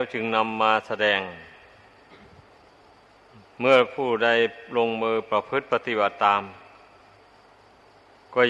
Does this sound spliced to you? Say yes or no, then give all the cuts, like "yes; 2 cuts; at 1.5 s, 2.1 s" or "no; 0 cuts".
no; 0 cuts